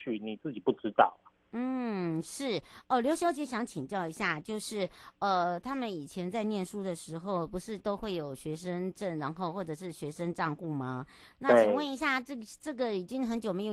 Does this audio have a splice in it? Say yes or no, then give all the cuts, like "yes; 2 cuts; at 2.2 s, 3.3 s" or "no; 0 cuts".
no; 0 cuts